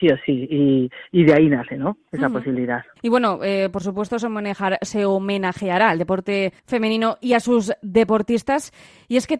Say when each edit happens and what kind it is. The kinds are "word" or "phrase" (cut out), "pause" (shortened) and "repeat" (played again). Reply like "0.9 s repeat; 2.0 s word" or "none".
3.0 s pause; 6.6 s pause